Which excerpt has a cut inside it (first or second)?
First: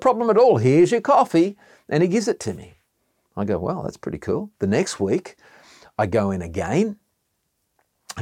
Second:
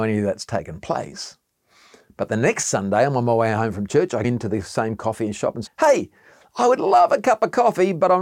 second